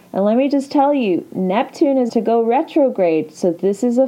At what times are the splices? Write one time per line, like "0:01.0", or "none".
0:02.1